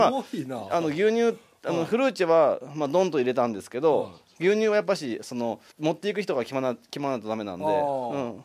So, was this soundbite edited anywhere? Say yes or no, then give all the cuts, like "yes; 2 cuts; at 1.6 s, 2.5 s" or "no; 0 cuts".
yes; 1 cut; at 5.7 s